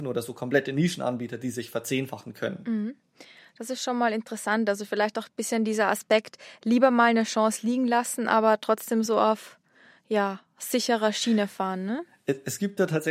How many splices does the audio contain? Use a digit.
0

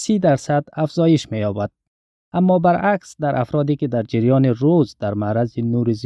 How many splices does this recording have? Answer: 0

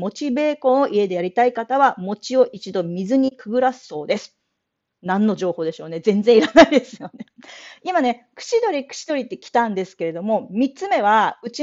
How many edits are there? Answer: 0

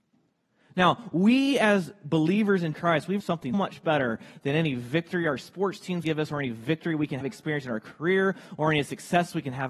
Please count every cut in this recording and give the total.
5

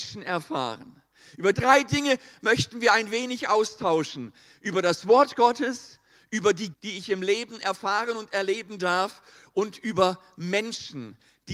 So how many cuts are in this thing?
2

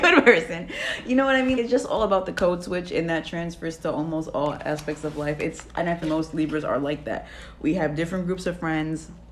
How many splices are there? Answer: 2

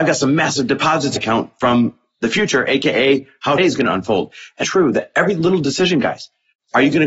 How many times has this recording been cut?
3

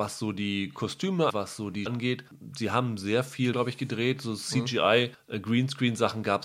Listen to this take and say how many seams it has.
3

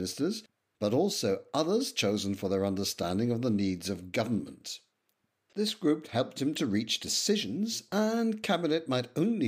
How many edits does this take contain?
0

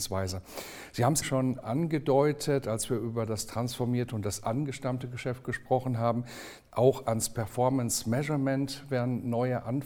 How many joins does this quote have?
1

